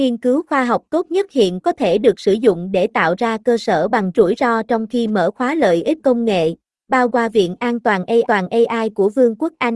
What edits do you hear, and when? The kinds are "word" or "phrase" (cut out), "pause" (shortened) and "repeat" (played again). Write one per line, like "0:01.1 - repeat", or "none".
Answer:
0:01.6 - word
0:04.1 - phrase
0:06.0 - word
0:07.1 - phrase
0:08.2 - repeat